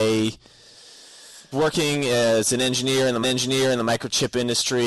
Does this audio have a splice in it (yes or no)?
yes